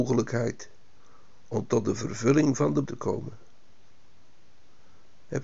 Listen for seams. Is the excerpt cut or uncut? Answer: cut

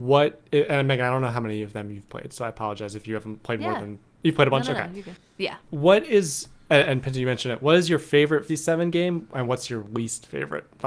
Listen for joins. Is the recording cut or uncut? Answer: cut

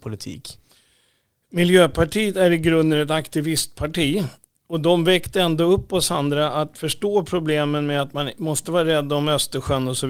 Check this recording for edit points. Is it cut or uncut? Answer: uncut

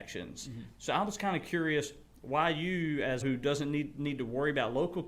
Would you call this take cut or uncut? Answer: cut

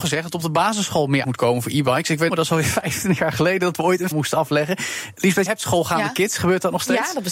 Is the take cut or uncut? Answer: cut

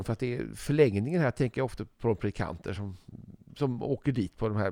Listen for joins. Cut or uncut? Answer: uncut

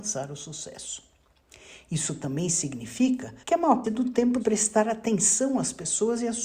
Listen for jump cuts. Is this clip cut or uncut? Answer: cut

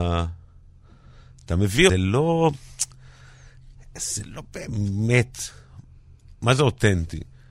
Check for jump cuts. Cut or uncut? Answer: cut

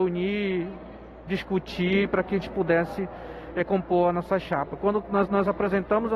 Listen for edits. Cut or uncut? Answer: cut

